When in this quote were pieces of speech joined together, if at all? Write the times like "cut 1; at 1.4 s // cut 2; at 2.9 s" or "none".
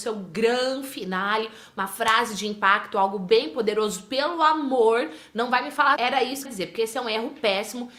cut 1; at 6.0 s // cut 2; at 6.4 s